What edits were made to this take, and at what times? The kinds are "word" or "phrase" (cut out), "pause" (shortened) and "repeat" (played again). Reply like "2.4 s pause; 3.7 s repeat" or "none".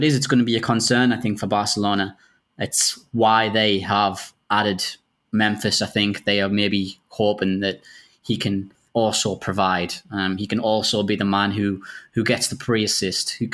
8.9 s word